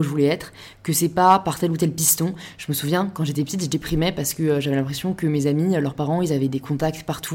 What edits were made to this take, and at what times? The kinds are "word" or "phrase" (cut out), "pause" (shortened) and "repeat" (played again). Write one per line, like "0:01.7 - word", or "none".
none